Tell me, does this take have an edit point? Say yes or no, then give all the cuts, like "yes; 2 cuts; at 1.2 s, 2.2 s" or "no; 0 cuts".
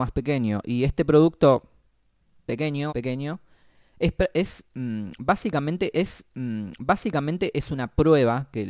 yes; 2 cuts; at 2.9 s, 5.9 s